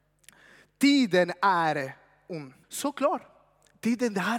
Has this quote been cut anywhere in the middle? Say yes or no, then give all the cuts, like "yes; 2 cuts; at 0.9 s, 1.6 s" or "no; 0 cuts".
yes; 1 cut; at 2.6 s